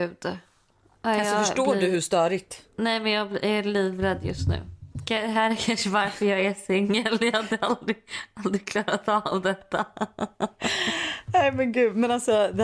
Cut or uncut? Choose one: cut